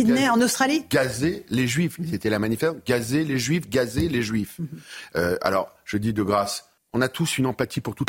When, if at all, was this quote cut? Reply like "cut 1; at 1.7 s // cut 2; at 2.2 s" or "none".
cut 1; at 6.8 s

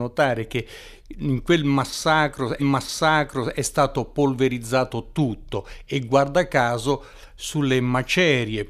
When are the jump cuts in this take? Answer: cut 1; at 2.6 s

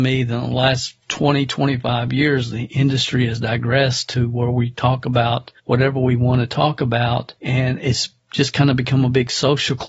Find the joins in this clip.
cut 1; at 1.0 s // cut 2; at 5.6 s // cut 3; at 7.4 s

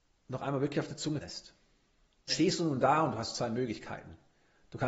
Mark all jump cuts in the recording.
cut 1; at 1.2 s // cut 2; at 2.3 s

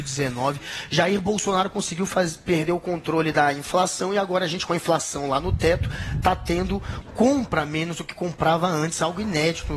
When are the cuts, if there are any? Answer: cut 1; at 7.0 s

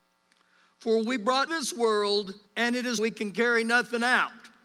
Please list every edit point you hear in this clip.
cut 1; at 1.5 s // cut 2; at 2.5 s // cut 3; at 3.0 s

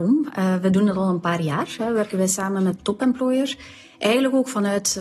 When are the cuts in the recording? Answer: cut 1; at 2.8 s

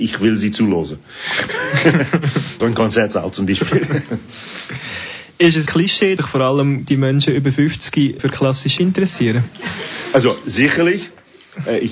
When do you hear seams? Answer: cut 1; at 2.6 s // cut 2; at 5.7 s // cut 3; at 6.2 s // cut 4; at 6.8 s // cut 5; at 8.2 s // cut 6; at 8.8 s

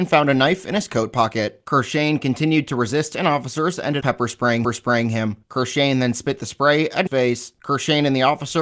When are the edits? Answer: cut 1; at 4.0 s // cut 2; at 4.6 s // cut 3; at 7.1 s

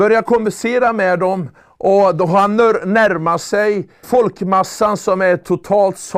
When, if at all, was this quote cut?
cut 1; at 1.6 s // cut 2; at 4.0 s

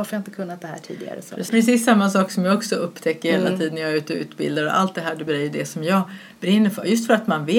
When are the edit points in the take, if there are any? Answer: cut 1; at 5.3 s

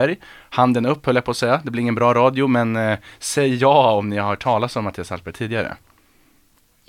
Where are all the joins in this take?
none

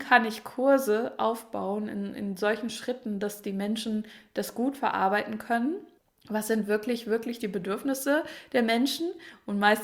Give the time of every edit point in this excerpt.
cut 1; at 6.0 s

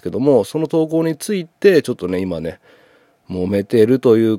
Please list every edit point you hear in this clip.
none

